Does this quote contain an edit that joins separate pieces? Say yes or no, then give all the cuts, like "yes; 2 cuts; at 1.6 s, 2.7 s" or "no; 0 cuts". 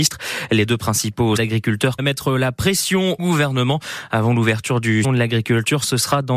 yes; 4 cuts; at 1.4 s, 2.0 s, 3.2 s, 5.0 s